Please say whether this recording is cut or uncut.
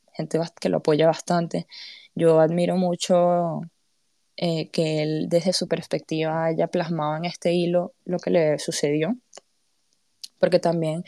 uncut